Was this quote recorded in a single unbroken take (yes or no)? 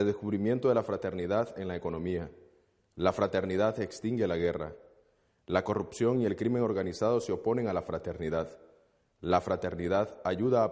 yes